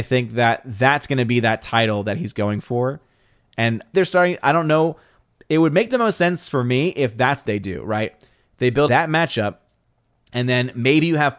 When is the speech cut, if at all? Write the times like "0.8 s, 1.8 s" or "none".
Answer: 3.9 s, 7.4 s, 8.9 s